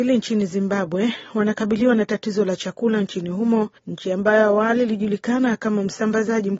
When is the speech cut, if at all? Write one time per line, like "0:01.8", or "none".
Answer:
0:03.8